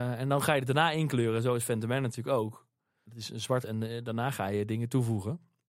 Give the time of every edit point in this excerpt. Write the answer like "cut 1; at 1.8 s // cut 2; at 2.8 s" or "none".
cut 1; at 3.6 s